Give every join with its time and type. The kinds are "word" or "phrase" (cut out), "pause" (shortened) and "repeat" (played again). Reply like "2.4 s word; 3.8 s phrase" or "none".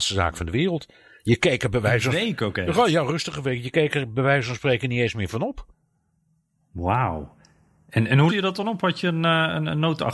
8.3 s word